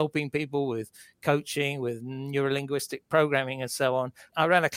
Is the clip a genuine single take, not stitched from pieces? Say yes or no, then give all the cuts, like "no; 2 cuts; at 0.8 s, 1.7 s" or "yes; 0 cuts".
yes; 0 cuts